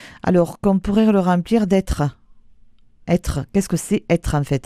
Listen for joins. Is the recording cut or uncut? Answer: uncut